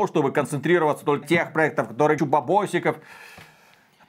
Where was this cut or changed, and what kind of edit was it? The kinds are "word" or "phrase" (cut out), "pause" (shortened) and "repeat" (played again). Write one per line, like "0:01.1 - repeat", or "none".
0:01.2 - word
0:02.2 - phrase